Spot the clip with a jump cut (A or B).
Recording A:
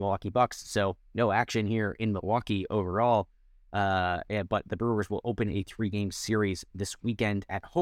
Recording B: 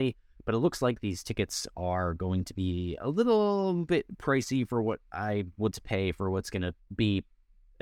B